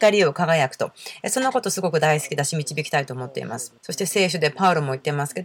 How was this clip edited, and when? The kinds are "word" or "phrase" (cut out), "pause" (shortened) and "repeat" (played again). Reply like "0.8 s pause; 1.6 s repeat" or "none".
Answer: 3.8 s pause